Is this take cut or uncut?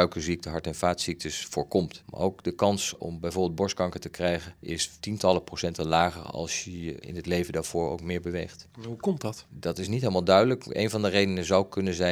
uncut